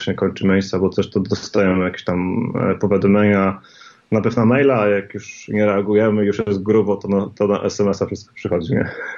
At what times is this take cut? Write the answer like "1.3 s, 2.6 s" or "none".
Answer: none